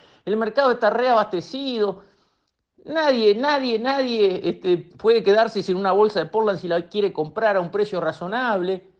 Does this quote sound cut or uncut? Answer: uncut